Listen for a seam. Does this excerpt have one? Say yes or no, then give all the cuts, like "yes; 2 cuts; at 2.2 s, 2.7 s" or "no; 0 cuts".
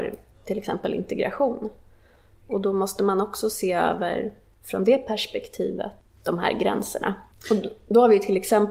no; 0 cuts